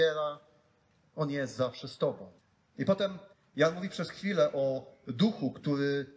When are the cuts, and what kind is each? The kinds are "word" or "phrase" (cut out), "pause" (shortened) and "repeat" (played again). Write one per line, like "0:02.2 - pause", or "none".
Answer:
0:02.4 - pause
0:03.3 - pause